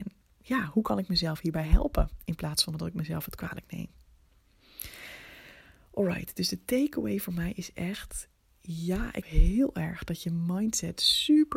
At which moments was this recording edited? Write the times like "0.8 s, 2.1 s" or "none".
9.2 s